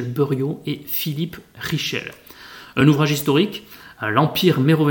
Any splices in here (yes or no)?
no